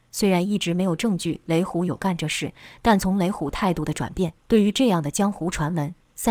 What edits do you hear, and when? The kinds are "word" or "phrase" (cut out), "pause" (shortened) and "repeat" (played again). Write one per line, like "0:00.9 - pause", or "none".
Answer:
0:04.4 - pause